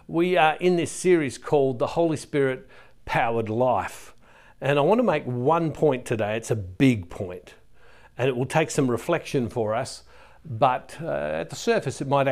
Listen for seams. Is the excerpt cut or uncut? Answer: uncut